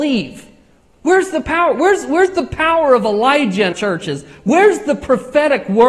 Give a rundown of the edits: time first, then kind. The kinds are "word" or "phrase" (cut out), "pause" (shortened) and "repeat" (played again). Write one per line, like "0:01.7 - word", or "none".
0:03.7 - word

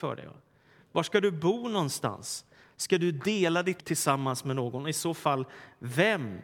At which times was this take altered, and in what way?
0:03.8 - word

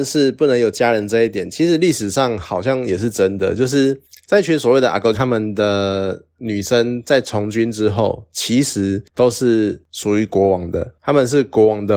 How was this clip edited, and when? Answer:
0:05.1 - word

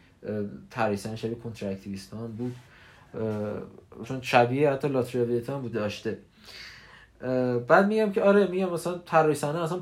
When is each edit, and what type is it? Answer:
0:04.0 - word
0:05.7 - phrase

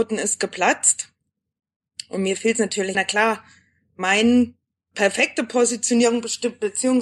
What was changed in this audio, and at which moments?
0:02.9 - word
0:04.9 - word

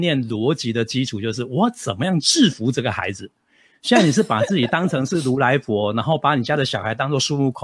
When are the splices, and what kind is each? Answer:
none

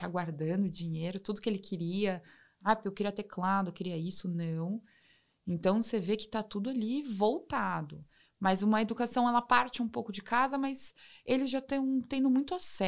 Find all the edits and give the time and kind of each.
none

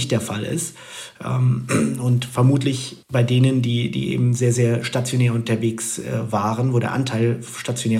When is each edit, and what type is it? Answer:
0:03.0 - pause

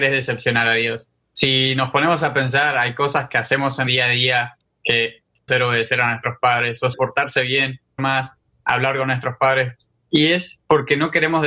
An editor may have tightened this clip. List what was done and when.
0:03.9 - word
0:05.5 - word
0:06.9 - word
0:08.0 - word

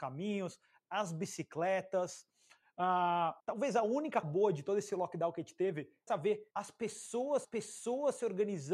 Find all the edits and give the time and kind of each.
0:03.4 - pause
0:04.2 - word
0:06.1 - phrase
0:06.5 - pause
0:07.4 - repeat

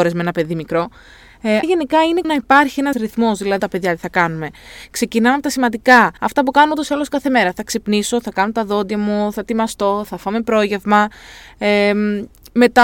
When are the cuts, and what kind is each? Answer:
0:01.6 - word
0:02.2 - word
0:02.9 - word
0:03.6 - phrase
0:06.2 - pause

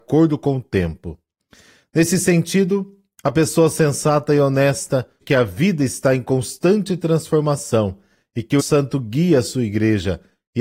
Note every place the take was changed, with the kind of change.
0:05.2 - word
0:08.6 - word

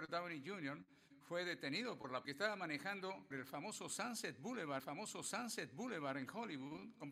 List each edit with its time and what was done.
0:02.2 - phrase
0:03.3 - word
0:04.8 - repeat

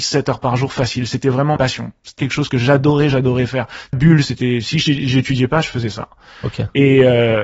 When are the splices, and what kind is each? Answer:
0:01.6 - word
0:02.2 - word
0:03.9 - word

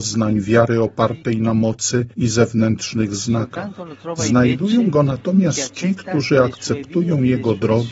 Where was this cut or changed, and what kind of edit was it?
none

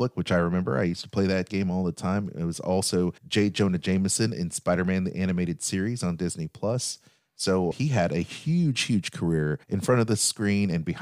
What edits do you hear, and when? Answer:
0:03.2 - pause
0:07.7 - word
0:09.6 - pause

